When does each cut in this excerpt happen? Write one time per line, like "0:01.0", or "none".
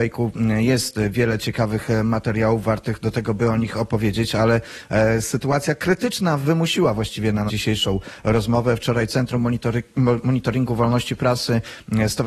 0:07.5